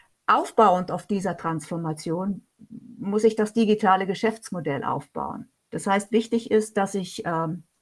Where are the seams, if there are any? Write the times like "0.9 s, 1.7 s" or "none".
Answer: 5.6 s